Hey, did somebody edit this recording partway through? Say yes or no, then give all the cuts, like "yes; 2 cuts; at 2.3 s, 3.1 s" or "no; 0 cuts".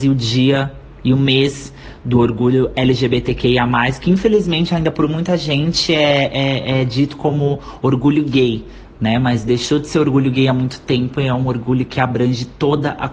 no; 0 cuts